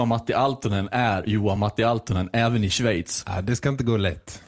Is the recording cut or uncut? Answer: uncut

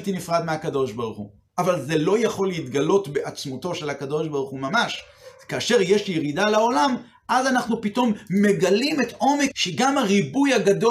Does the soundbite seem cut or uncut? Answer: cut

